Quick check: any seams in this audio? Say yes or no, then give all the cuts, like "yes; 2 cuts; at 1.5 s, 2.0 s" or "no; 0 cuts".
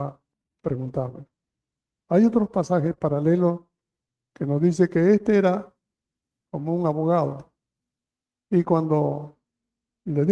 no; 0 cuts